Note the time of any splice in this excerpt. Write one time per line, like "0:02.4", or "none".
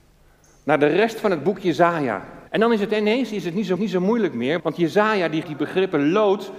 0:02.5
0:03.8
0:04.6
0:05.4